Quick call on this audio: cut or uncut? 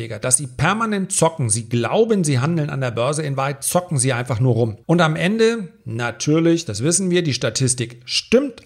cut